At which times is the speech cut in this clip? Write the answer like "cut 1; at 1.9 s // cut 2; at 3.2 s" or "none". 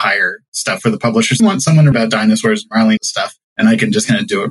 cut 1; at 1.4 s // cut 2; at 1.9 s // cut 3; at 3.0 s // cut 4; at 3.4 s